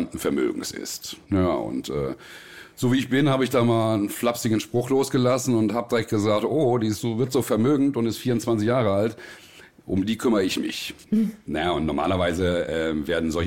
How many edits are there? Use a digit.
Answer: 0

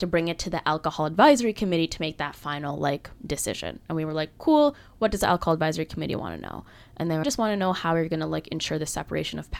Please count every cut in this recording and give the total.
1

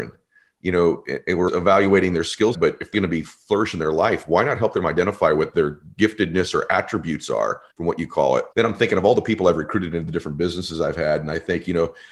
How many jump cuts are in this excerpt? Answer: 5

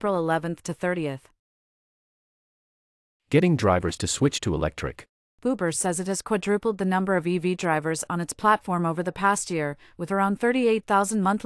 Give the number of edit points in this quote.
0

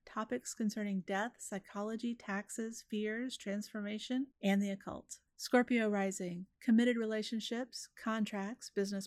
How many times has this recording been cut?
3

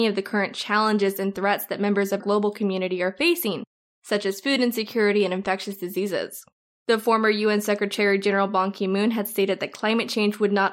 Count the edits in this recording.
1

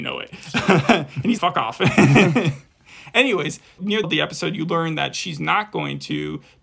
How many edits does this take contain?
2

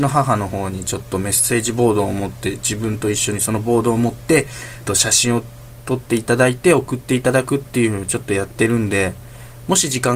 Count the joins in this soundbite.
1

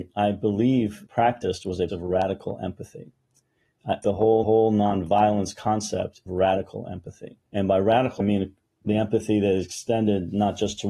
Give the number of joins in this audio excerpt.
7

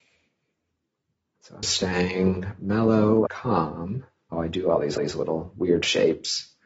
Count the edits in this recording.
4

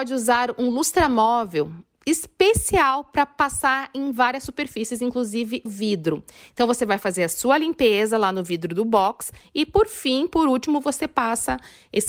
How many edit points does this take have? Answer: 1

